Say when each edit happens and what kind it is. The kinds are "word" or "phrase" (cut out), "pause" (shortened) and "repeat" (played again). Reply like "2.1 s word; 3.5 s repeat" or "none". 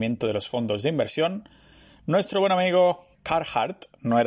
3.1 s word